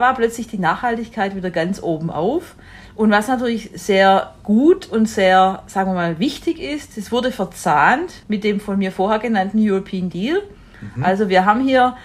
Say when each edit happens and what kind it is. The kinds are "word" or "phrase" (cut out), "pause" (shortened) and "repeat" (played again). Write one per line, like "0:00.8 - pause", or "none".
0:08.2 - pause
0:10.1 - word